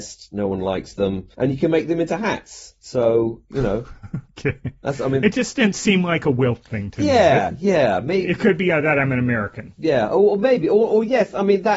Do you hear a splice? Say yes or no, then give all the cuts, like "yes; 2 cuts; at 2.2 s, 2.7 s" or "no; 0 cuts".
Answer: yes; 1 cut; at 1.3 s